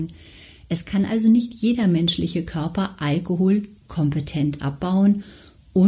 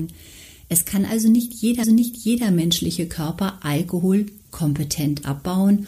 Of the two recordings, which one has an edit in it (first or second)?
second